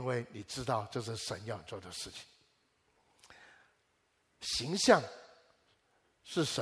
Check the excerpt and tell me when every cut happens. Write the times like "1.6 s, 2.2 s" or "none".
none